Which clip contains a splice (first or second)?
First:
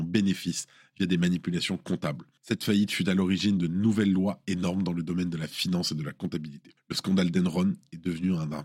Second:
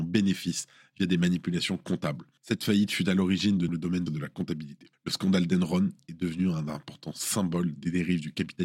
second